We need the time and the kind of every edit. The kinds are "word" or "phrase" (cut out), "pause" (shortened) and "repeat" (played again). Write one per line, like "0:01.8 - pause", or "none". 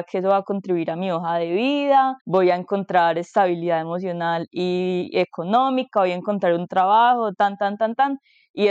0:02.2 - pause

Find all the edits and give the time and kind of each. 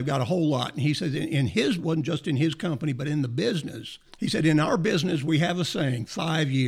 0:01.8 - phrase
0:04.1 - pause

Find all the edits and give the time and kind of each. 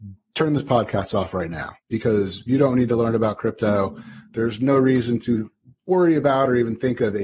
0:01.8 - pause

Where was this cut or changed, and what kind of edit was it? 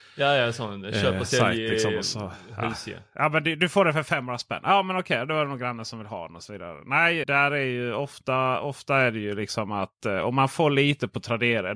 0:07.2 - word

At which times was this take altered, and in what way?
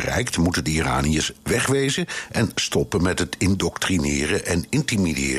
none

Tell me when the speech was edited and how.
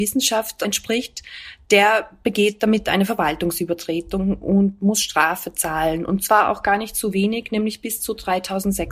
none

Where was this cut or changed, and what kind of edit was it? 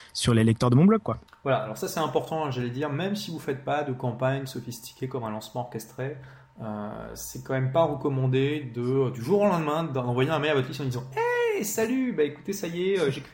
0:01.3 - pause

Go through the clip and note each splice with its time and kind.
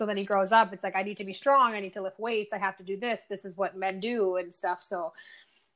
none

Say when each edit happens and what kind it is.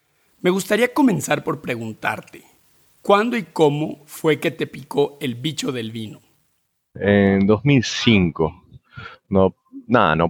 none

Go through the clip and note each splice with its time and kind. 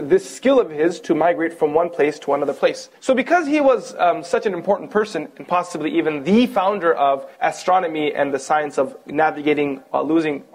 0:03.0 - pause
0:07.3 - pause

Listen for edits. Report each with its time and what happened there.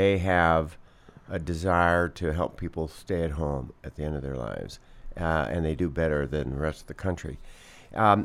none

